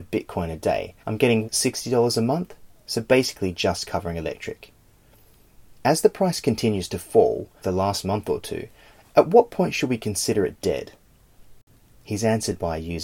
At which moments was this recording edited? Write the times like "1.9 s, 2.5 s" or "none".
1.0 s, 1.4 s, 7.6 s